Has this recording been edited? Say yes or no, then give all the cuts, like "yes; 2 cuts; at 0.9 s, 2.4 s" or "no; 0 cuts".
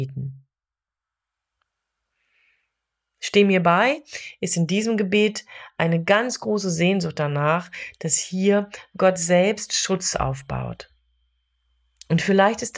no; 0 cuts